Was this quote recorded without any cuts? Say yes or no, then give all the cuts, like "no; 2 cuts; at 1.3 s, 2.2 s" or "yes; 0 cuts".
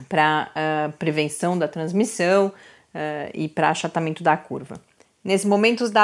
yes; 0 cuts